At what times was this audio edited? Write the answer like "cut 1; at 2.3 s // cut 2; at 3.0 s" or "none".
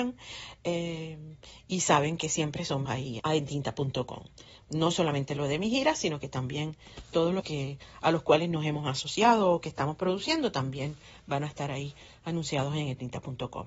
cut 1; at 2.9 s // cut 2; at 3.2 s // cut 3; at 7.4 s